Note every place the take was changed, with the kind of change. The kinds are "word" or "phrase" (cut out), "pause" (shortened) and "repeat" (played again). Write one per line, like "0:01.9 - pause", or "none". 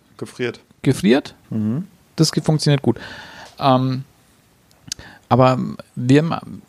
0:01.4 - pause